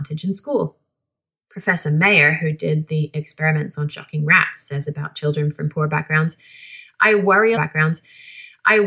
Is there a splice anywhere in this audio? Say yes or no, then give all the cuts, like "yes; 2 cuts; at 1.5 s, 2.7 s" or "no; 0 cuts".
yes; 1 cut; at 7.5 s